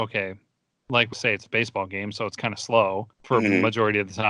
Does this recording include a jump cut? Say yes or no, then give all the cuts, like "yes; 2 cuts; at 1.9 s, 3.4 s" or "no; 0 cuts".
yes; 2 cuts; at 1.1 s, 3.1 s